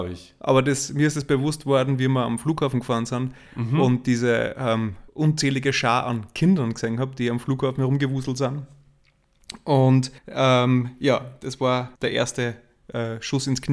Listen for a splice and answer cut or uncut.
cut